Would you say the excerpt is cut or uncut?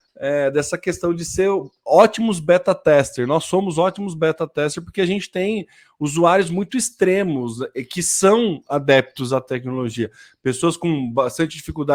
uncut